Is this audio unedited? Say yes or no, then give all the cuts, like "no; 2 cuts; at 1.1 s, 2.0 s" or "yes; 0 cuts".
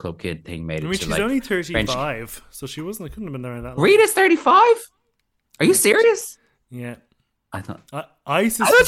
yes; 0 cuts